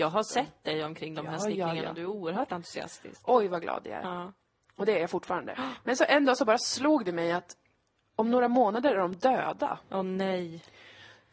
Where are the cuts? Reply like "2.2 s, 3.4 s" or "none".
none